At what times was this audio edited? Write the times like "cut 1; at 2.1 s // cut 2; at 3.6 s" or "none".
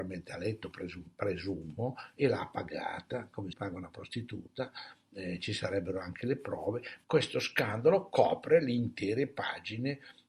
cut 1; at 3.5 s // cut 2; at 7.0 s